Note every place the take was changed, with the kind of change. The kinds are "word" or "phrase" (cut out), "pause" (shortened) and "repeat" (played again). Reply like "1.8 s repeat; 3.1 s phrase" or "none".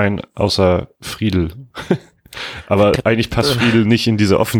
3.0 s word